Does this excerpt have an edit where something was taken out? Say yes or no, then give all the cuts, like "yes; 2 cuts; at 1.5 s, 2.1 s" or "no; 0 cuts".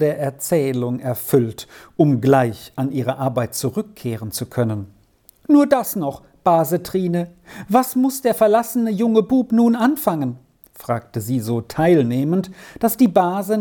no; 0 cuts